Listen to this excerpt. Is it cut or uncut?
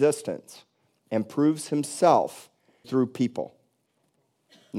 cut